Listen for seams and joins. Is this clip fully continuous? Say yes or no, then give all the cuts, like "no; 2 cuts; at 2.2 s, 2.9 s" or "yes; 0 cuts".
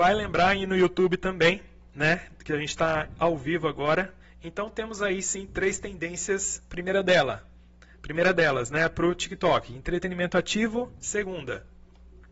yes; 0 cuts